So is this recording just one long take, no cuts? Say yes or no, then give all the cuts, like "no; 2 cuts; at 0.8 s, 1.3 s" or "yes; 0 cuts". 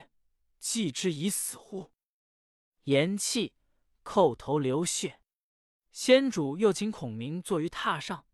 yes; 0 cuts